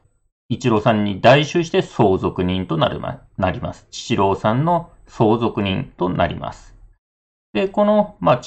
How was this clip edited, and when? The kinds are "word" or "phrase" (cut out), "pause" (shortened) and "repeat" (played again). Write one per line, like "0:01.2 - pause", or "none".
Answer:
none